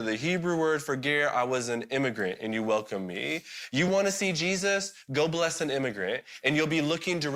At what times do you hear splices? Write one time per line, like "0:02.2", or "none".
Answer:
none